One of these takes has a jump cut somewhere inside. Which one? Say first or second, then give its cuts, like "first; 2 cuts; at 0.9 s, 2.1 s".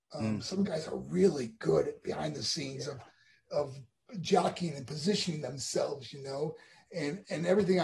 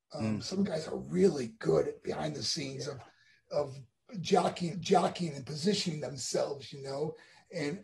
second; 1 cut; at 4.7 s